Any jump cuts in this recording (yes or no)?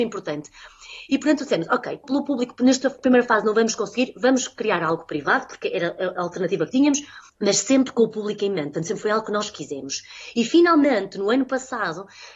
yes